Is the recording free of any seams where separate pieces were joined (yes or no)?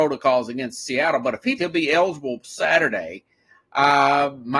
no